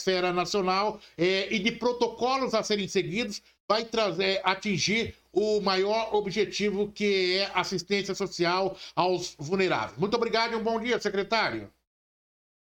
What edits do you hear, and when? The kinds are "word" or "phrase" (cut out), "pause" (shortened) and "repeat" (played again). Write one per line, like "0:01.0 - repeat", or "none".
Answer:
none

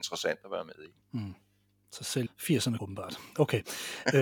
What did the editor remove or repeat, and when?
0:01.0 - pause
0:02.3 - word
0:02.8 - phrase

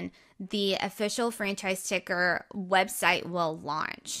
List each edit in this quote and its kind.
none

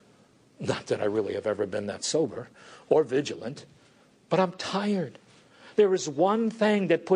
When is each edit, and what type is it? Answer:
none

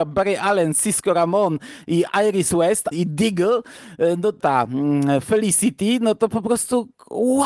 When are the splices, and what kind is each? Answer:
0:02.9 - phrase
0:04.4 - phrase

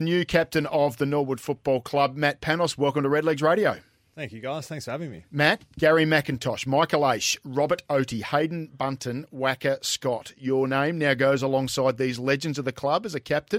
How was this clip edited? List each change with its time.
none

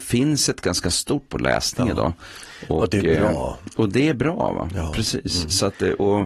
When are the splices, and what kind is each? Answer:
0:01.3 - word

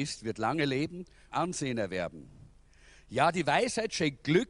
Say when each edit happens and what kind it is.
0:01.3 - phrase

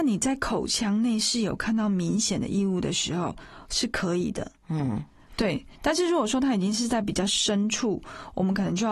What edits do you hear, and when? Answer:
0:04.6 - pause

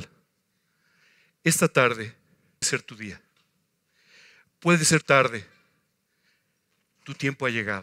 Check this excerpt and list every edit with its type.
0:02.6 - word
0:05.0 - word

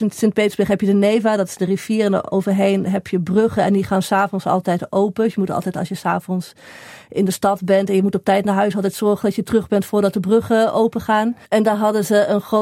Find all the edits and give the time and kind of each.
0:11.4 - pause

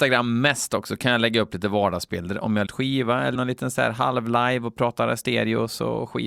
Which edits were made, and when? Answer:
0:02.7 - phrase
0:03.3 - word

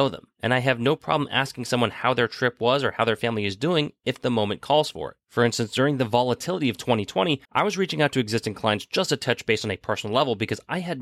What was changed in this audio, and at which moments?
0:05.2 - pause
0:07.4 - pause

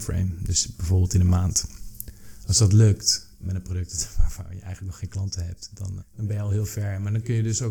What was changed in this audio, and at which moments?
0:03.4 - word
0:06.0 - word

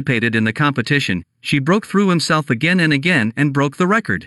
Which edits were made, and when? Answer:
none

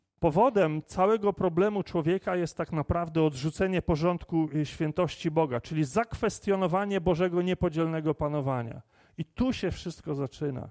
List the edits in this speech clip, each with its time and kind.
none

